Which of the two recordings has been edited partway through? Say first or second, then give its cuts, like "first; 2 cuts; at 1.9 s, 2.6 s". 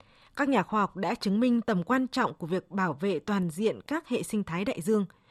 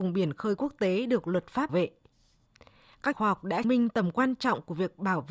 second; 3 cuts; at 1.7 s, 3.1 s, 3.6 s